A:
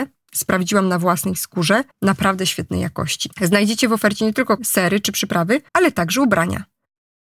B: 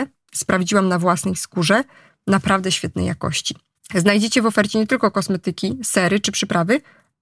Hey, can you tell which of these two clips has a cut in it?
A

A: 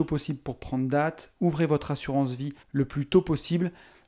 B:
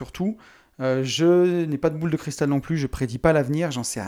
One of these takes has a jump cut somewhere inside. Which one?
A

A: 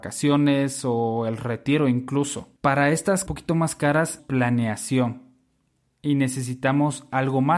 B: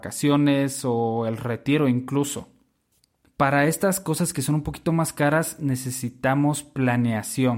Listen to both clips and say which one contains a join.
A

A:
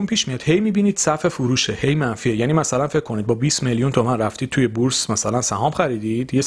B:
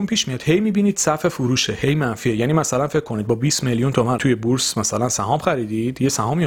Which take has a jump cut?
B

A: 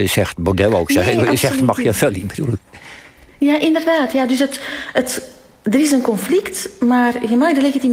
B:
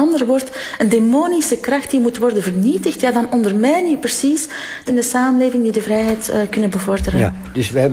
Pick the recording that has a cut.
B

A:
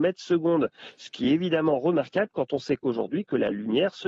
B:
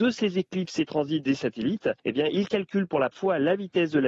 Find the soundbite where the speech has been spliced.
B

